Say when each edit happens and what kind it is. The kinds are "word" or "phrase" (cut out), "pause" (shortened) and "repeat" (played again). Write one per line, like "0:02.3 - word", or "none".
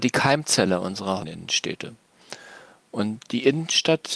0:01.2 - word